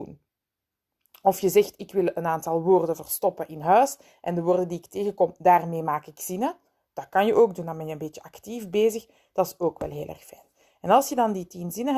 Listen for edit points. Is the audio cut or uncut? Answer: uncut